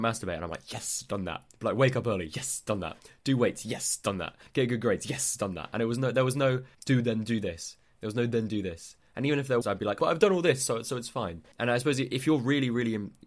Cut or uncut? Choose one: cut